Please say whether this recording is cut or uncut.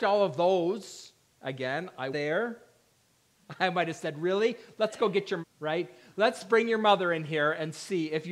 cut